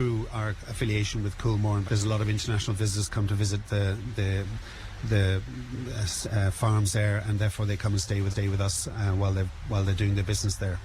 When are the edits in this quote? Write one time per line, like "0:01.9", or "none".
0:01.8
0:08.3